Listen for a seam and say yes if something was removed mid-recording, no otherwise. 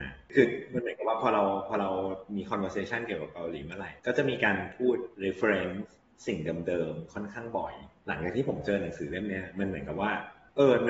yes